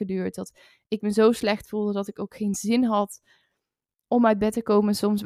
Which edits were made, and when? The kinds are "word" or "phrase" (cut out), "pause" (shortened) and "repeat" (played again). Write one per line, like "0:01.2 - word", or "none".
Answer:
none